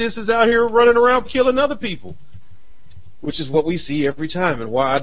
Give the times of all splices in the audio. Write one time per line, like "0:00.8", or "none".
0:01.2